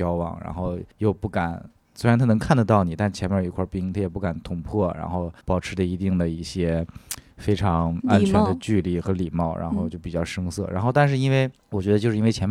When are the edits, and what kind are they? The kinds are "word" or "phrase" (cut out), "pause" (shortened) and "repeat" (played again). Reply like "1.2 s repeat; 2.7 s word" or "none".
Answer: 0.9 s pause; 5.4 s pause; 11.6 s pause

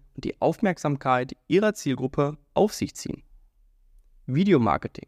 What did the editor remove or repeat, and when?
none

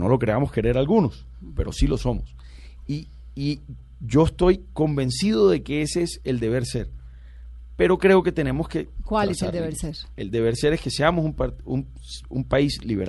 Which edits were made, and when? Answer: none

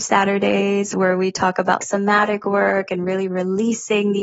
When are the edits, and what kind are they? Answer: 1.8 s word

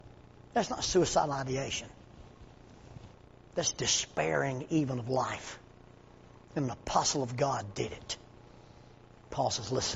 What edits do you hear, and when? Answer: none

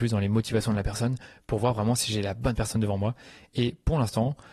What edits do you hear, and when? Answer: none

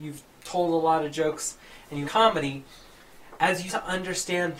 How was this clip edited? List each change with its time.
2.0 s word; 3.7 s word

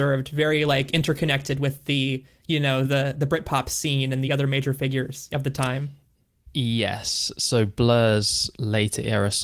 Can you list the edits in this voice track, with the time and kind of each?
none

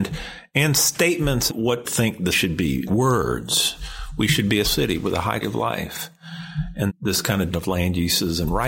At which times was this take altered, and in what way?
1.5 s word; 1.8 s word; 2.3 s word; 2.9 s word; 4.6 s word; 5.4 s word; 6.9 s word; 7.5 s word

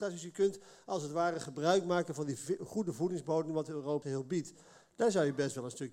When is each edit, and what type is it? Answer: 4.0 s word

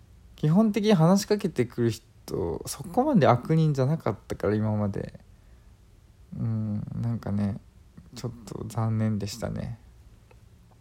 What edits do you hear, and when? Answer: none

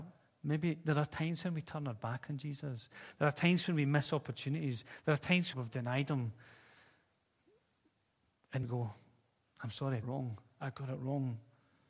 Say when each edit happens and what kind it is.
5.5 s phrase; 8.6 s word; 10.0 s phrase

